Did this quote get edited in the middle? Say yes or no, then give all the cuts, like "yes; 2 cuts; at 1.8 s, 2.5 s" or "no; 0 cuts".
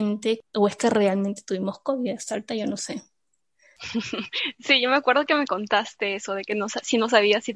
no; 0 cuts